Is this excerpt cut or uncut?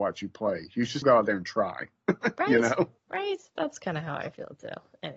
cut